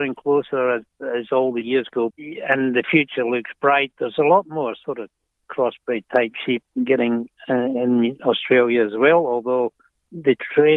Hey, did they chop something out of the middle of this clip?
yes; 1 cut; at 2.1 s

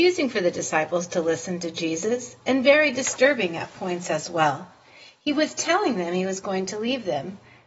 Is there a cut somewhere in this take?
no; 0 cuts

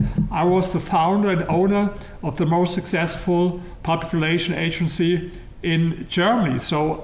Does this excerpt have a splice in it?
no; 0 cuts

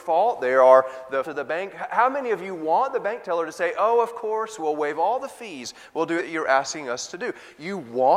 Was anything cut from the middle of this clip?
yes; 2 cuts; at 1.2 s, 6.2 s

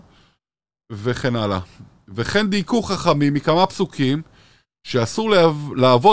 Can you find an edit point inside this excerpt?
no; 0 cuts

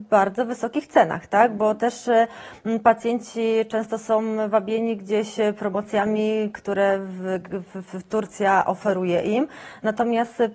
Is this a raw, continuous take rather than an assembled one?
yes; 0 cuts

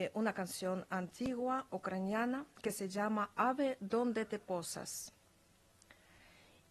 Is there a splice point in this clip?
no; 0 cuts

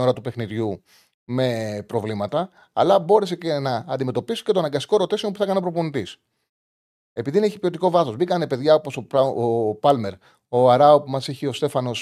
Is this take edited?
no; 0 cuts

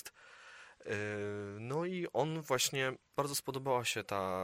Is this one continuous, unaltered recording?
no; 1 cut; at 3.0 s

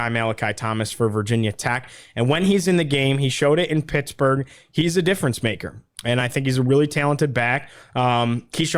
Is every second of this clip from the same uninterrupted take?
yes; 0 cuts

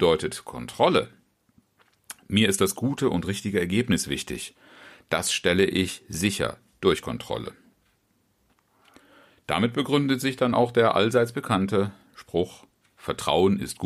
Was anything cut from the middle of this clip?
no; 0 cuts

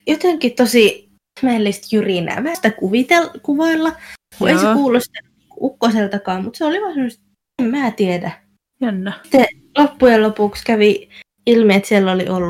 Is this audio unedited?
no; 1 cut; at 2.5 s

